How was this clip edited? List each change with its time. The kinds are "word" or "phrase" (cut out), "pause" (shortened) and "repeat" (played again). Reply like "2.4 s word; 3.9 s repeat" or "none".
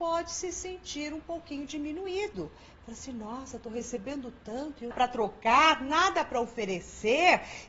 4.9 s phrase

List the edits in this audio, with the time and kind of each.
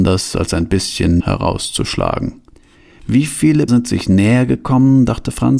1.2 s word; 3.7 s word

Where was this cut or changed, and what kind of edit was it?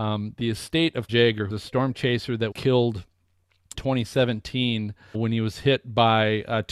1.1 s word; 1.5 s word; 2.5 s word; 3.7 s word; 5.1 s word

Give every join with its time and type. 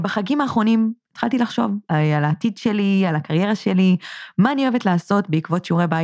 1.9 s pause

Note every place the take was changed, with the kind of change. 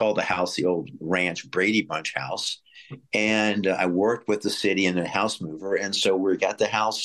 none

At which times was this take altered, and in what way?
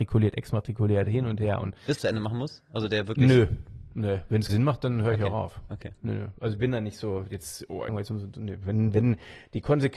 2.0 s phrase; 4.5 s word; 7.9 s phrase

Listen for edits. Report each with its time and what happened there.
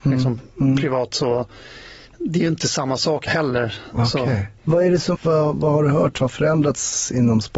3.3 s phrase; 4.6 s pause; 5.1 s word

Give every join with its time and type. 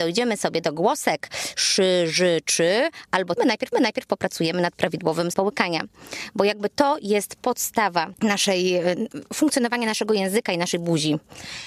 3.4 s phrase; 3.7 s repeat; 5.3 s word

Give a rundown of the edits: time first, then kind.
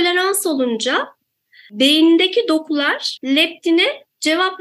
3.2 s word

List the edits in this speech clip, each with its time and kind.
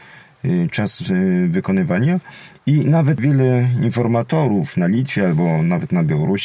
none

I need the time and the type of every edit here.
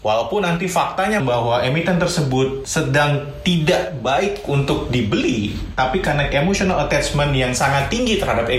1.2 s word; 6.3 s phrase

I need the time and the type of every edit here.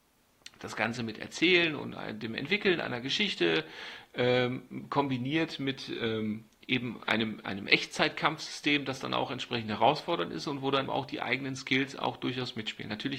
10.9 s word

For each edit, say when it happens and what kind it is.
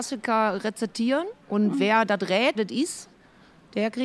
1.4 s pause; 2.5 s word

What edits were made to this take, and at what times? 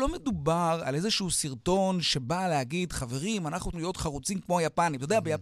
3.7 s word

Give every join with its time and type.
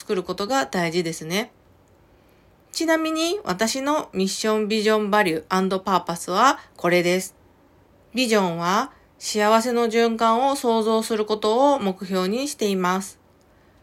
none

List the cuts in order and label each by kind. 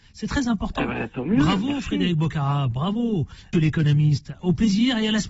3.5 s word

